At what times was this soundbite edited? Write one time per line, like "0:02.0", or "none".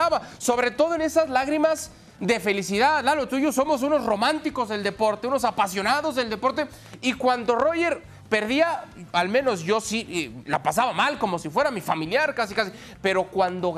none